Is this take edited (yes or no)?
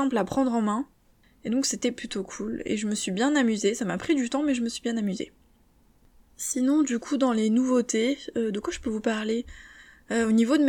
no